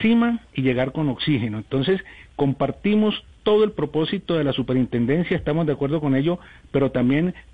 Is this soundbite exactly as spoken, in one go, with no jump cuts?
yes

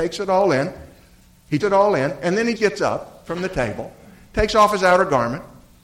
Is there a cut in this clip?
yes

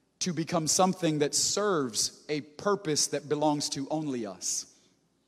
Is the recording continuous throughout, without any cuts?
yes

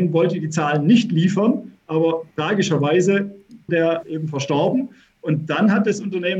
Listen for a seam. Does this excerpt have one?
yes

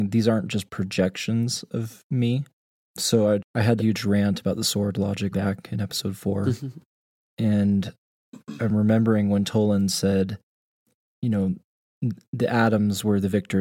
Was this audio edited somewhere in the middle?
yes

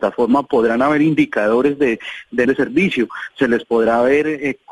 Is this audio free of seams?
no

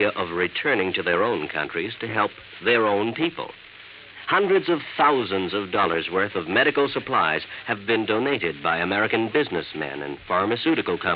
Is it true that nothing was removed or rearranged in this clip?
yes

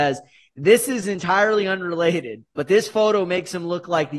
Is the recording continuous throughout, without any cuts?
no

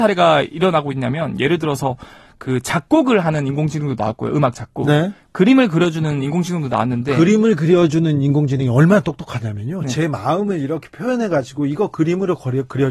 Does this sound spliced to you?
no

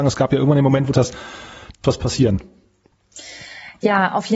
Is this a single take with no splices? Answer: no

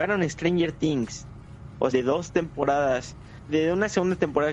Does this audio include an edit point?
yes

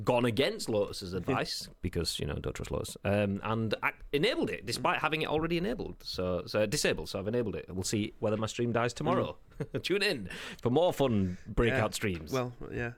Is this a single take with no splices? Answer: yes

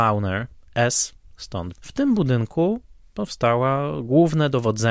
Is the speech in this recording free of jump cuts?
no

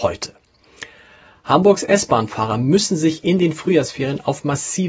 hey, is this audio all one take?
yes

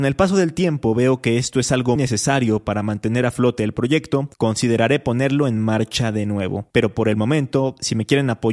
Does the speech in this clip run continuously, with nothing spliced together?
no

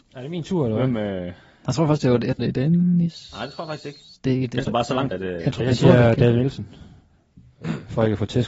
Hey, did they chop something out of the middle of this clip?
yes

